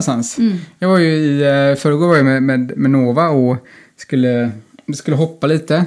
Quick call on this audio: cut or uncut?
uncut